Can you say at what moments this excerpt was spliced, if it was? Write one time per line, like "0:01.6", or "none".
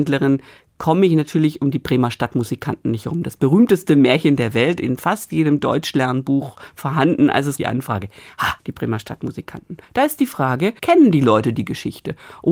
0:07.6
0:10.8